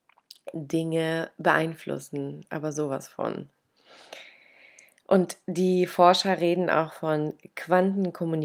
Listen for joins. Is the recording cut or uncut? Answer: uncut